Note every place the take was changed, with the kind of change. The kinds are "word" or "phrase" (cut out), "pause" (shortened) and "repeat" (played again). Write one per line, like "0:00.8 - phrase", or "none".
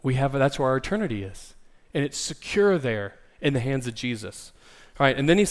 none

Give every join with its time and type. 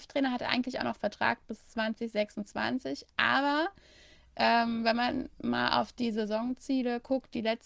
none

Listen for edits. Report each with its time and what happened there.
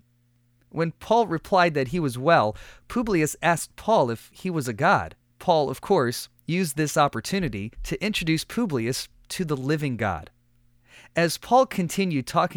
0:05.2 - pause
0:07.7 - pause

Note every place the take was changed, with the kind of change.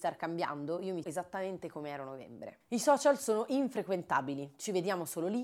0:01.0 - word

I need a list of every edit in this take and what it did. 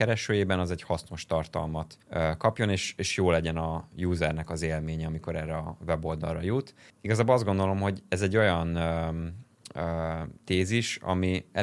0:02.0 - pause
0:06.9 - pause
0:10.4 - pause

